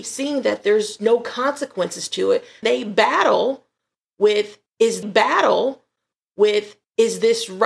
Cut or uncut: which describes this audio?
cut